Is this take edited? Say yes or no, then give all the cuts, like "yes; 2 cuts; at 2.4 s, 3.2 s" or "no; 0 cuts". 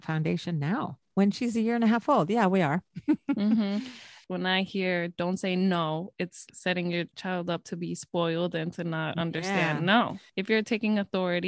yes; 1 cut; at 6.5 s